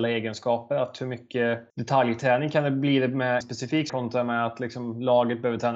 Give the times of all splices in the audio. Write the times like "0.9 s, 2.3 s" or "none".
1.7 s, 3.4 s, 3.9 s